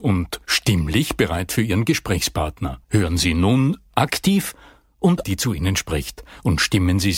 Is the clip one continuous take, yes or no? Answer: no